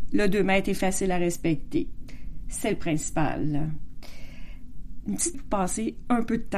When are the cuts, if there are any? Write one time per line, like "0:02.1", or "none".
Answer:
0:05.3